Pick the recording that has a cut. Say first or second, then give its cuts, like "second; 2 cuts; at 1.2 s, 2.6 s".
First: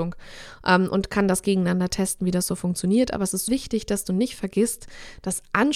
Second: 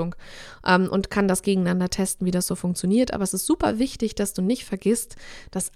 first; 1 cut; at 3.5 s